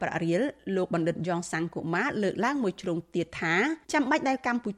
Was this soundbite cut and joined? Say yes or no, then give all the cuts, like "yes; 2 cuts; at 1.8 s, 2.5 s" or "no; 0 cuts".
yes; 1 cut; at 3.8 s